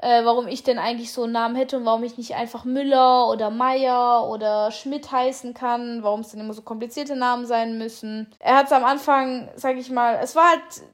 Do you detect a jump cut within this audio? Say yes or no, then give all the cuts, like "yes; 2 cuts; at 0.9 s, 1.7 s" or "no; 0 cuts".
yes; 1 cut; at 8.4 s